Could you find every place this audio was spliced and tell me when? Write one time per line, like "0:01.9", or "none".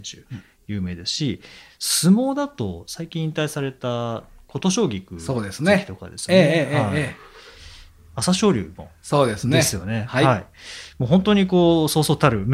none

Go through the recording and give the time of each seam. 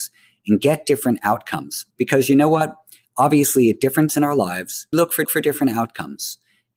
0:01.9
0:04.1
0:04.9
0:05.2

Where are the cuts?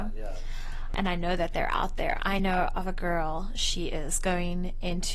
none

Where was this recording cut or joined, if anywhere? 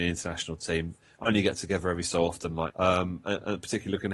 0:02.7

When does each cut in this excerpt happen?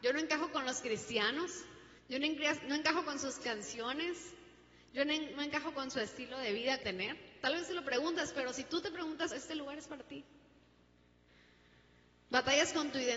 0:02.0
0:06.8
0:09.3

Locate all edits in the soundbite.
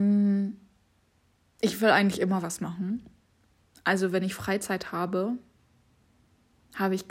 none

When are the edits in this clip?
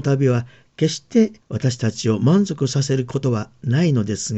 0:01.4

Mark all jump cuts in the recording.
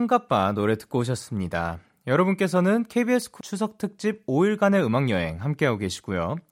0:03.4

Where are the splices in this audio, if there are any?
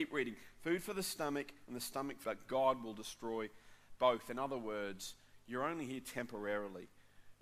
0:02.2

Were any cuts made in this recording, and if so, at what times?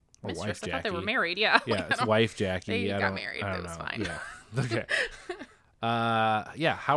none

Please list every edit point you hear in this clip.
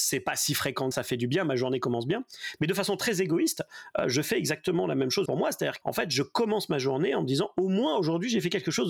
0:00.9
0:05.2
0:05.8

